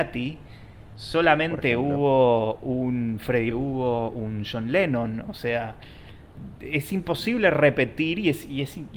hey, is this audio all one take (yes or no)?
no